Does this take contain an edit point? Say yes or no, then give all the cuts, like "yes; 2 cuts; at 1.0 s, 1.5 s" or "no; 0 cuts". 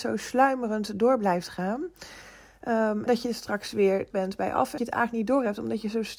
yes; 3 cuts; at 3.1 s, 4.1 s, 4.8 s